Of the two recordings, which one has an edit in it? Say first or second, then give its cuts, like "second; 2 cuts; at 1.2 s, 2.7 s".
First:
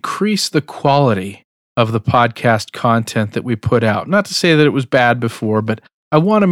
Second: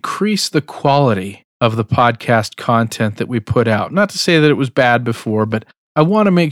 second; 1 cut; at 1.5 s